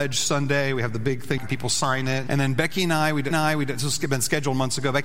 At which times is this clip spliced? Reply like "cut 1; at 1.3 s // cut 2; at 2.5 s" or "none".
cut 1; at 1.4 s // cut 2; at 2.3 s // cut 3; at 3.3 s